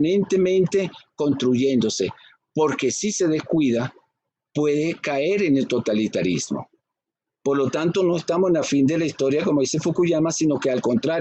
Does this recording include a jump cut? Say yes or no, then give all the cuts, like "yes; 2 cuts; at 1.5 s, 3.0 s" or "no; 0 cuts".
no; 0 cuts